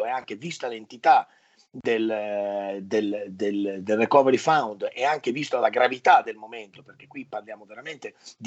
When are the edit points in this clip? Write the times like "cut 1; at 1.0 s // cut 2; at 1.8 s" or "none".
none

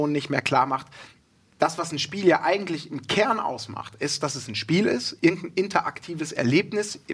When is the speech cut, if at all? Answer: none

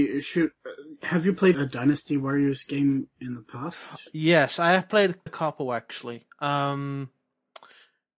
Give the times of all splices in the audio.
cut 1; at 1.5 s // cut 2; at 5.3 s

